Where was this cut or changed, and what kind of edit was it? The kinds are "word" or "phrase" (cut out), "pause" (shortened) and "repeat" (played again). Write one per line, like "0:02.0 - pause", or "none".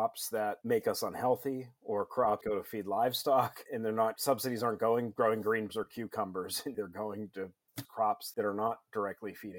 0:02.4 - word
0:03.7 - word
0:05.1 - word
0:05.7 - word
0:06.7 - word
0:07.8 - word
0:08.3 - word